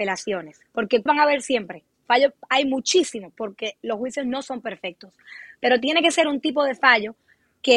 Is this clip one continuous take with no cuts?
no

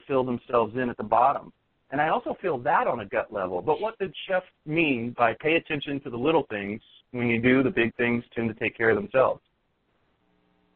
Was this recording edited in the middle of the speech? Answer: no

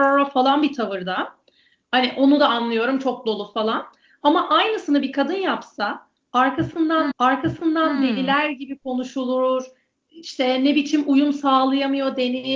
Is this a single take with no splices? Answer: no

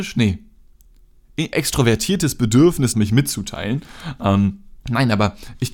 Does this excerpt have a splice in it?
yes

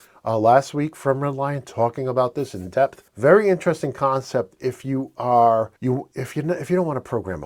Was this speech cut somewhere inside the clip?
yes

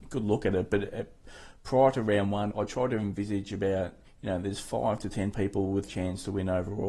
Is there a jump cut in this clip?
yes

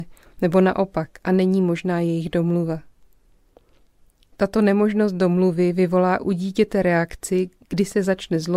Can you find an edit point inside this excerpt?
no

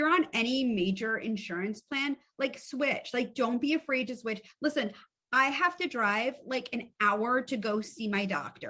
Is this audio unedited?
yes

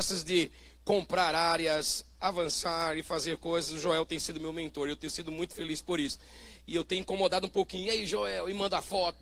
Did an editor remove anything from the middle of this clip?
no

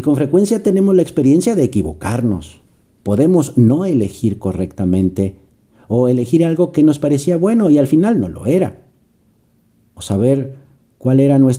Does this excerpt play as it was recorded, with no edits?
yes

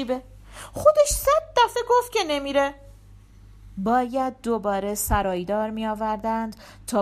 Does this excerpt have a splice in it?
no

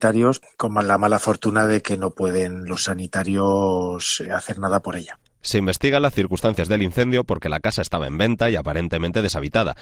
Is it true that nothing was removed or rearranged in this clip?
yes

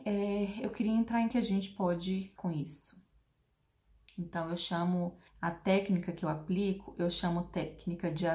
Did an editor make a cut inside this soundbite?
yes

